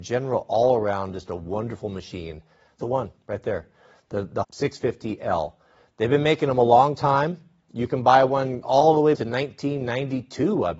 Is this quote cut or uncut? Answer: cut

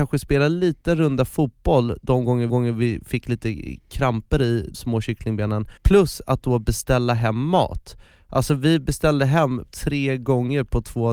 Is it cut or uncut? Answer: cut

